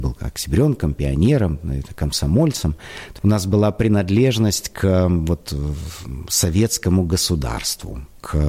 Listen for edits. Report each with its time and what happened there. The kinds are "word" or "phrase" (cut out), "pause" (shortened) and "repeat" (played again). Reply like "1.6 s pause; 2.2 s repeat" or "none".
none

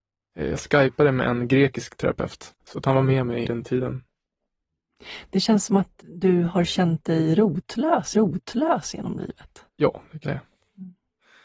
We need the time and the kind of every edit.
2.6 s pause; 3.4 s word; 6.0 s word; 8.1 s repeat; 9.7 s pause; 10.2 s word

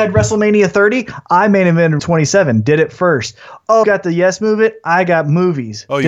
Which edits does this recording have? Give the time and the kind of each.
2.0 s word; 3.8 s word

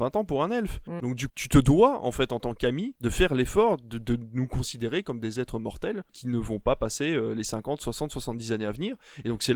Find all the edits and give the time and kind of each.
1.3 s word

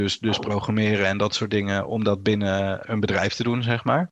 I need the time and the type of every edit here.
2.8 s word

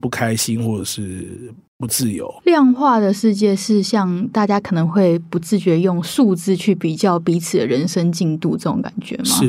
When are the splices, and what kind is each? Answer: 2.4 s pause

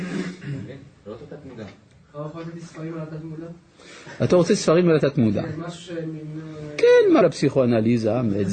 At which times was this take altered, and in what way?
7.2 s word

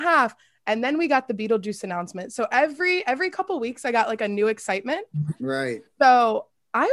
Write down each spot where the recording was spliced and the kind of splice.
none

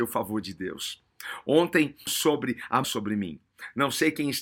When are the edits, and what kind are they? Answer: 2.1 s word; 2.8 s phrase

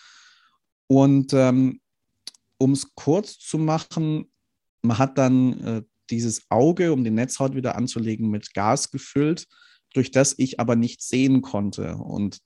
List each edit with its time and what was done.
none

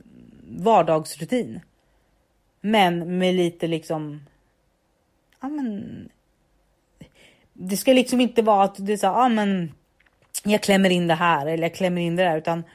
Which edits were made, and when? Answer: none

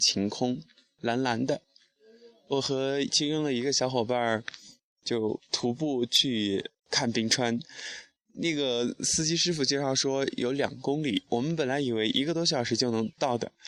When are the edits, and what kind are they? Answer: 6.8 s pause

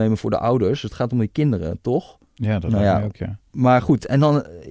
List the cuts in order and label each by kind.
2.3 s pause

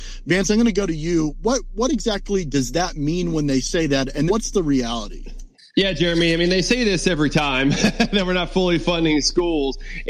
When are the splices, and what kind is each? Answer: 4.3 s word; 5.5 s pause

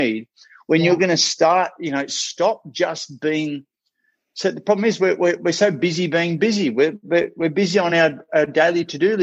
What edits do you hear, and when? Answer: none

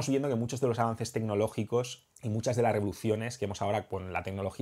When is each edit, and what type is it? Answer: 2.1 s pause

